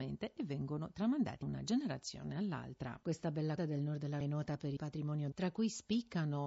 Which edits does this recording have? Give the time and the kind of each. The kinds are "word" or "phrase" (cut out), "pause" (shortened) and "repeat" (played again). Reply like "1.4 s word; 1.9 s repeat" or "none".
1.4 s word; 3.6 s word; 4.2 s word; 4.8 s word; 5.3 s word